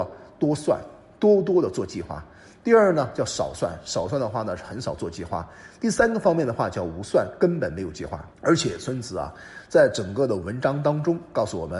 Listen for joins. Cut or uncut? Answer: cut